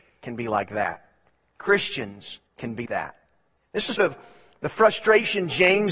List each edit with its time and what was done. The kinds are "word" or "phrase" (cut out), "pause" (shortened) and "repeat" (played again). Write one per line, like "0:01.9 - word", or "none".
0:02.5 - pause
0:02.9 - word
0:04.0 - word